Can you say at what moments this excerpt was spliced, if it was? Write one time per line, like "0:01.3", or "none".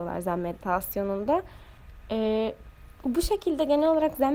none